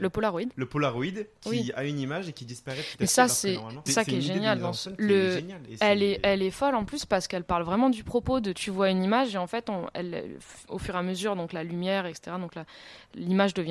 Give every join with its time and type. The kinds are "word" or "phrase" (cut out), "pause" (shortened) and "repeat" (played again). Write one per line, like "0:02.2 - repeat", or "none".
0:03.9 - word